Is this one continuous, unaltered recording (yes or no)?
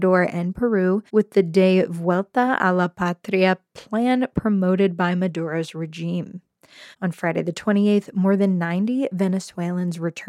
no